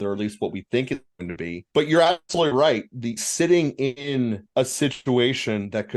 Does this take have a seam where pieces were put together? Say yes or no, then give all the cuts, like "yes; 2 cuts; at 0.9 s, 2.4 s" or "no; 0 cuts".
yes; 3 cuts; at 1.7 s, 3.2 s, 4.5 s